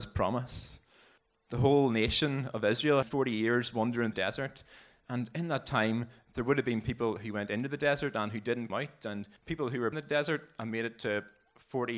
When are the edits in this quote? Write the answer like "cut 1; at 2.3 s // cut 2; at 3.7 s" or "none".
cut 1; at 1.2 s // cut 2; at 3.0 s // cut 3; at 4.1 s // cut 4; at 8.7 s // cut 5; at 9.4 s // cut 6; at 9.9 s